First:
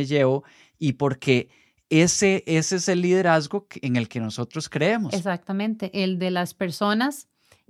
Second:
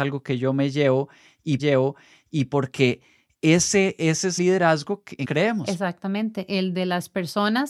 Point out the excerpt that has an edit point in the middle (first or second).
second